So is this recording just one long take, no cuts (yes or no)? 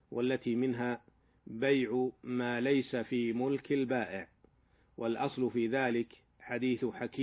yes